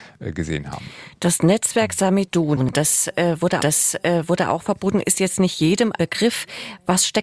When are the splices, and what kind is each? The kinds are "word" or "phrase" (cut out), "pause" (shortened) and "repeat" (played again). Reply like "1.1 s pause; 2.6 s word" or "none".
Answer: 3.6 s repeat; 6.0 s word